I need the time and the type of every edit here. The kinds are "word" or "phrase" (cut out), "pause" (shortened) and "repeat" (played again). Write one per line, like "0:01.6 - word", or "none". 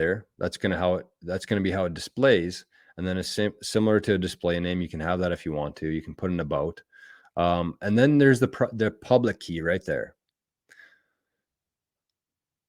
none